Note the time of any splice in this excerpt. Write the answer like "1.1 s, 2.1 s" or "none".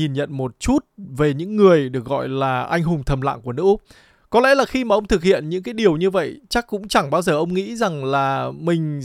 none